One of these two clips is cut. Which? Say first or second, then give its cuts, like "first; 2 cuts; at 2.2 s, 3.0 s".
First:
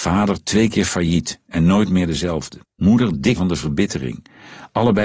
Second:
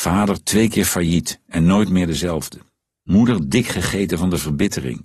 first; 2 cuts; at 2.6 s, 3.4 s